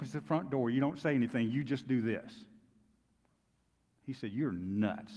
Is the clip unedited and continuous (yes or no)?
yes